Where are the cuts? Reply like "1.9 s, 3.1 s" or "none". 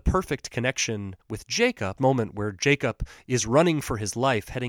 1.2 s, 2.0 s